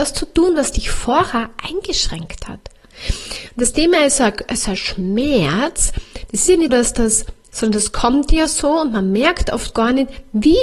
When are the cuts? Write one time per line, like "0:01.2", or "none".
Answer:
0:06.7